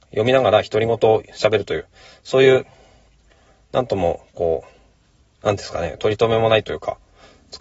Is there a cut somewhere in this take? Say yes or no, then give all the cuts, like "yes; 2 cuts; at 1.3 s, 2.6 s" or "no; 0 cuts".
no; 0 cuts